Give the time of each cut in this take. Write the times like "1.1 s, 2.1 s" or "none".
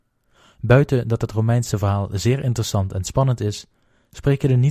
none